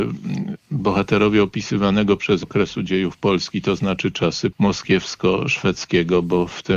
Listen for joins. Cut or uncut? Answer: cut